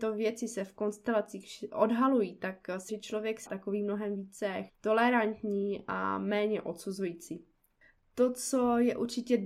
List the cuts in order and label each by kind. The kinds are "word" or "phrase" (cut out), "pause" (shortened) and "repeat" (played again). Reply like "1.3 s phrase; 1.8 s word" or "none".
2.9 s word; 3.5 s word; 4.7 s word